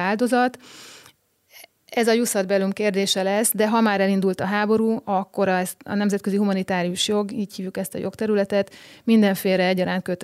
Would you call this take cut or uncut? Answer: uncut